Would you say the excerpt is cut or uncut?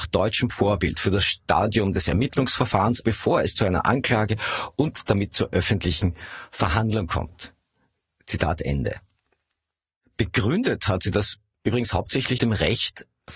cut